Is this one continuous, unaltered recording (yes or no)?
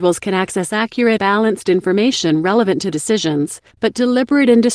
no